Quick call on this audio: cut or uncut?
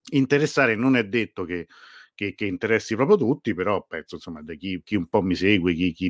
uncut